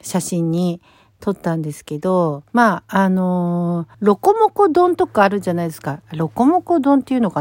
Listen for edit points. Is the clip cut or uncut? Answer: cut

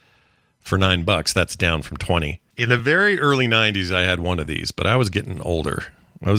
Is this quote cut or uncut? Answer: uncut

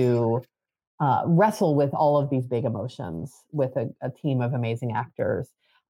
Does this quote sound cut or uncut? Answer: uncut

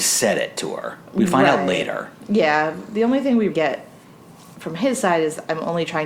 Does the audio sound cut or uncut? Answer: cut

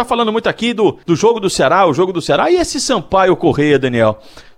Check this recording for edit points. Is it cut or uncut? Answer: cut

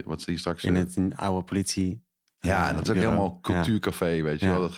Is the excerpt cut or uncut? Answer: uncut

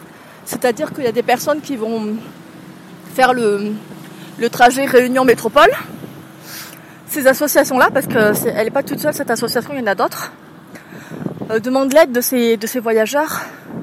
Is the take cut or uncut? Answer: uncut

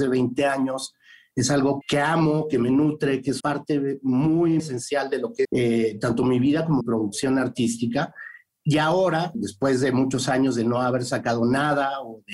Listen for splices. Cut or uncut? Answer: cut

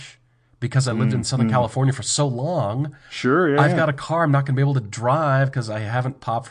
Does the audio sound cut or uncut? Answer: cut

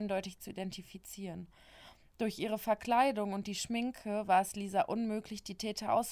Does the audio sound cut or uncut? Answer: uncut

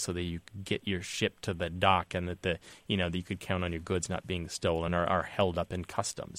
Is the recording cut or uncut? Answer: uncut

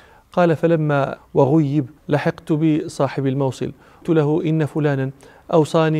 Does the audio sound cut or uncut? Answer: cut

